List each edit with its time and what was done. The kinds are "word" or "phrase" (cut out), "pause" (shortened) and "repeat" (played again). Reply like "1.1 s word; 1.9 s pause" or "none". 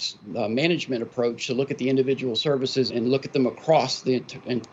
2.9 s word